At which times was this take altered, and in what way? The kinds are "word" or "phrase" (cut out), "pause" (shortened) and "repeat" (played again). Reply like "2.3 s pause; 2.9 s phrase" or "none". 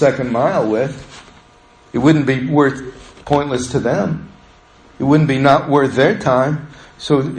none